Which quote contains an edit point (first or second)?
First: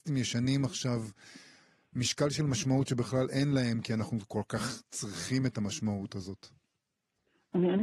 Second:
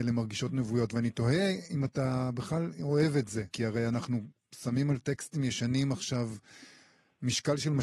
second